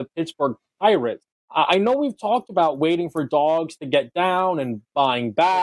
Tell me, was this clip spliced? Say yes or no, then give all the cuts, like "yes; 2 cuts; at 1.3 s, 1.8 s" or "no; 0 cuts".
yes; 1 cut; at 1.3 s